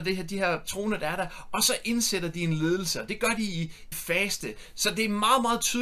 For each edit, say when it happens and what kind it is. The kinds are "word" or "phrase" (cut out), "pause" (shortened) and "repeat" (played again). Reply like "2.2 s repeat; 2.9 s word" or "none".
3.9 s phrase